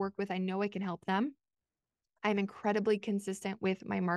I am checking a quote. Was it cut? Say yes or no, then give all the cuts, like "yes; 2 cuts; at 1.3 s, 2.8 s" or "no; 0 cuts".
no; 0 cuts